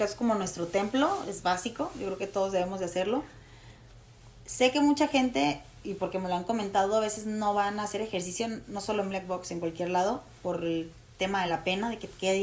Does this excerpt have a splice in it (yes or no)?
no